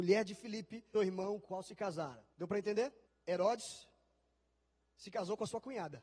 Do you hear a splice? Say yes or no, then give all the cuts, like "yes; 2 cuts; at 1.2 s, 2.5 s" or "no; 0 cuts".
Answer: yes; 4 cuts; at 0.9 s, 1.4 s, 2.3 s, 3.1 s